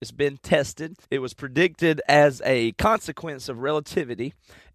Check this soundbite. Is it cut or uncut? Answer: cut